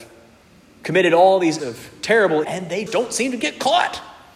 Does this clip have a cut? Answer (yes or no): yes